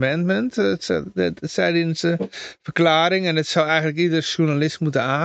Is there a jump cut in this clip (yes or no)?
no